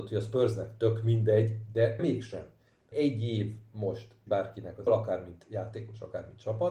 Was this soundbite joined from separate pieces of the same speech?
yes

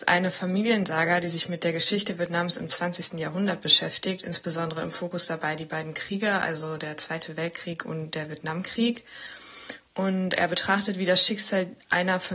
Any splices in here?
no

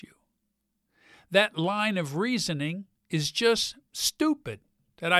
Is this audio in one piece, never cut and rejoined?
no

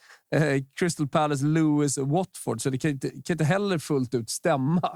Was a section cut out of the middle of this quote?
no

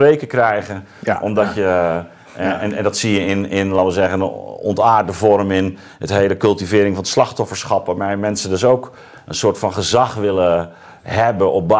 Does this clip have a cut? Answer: no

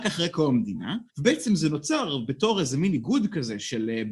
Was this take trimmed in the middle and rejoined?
yes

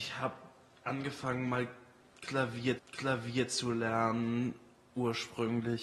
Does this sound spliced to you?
yes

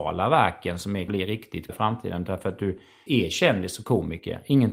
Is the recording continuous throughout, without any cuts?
no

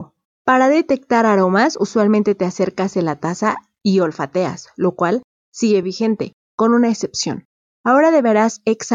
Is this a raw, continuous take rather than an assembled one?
yes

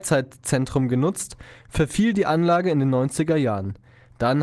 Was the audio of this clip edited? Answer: no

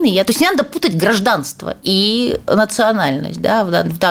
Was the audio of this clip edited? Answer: no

